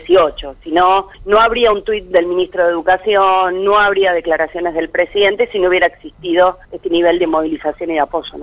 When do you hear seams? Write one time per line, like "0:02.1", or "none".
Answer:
0:01.1
0:06.6